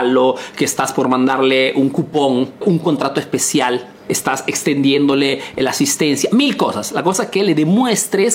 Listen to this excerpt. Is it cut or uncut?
cut